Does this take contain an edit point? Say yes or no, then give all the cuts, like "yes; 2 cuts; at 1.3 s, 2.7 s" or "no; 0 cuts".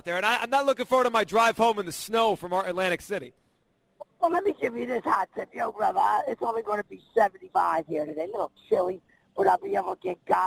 no; 0 cuts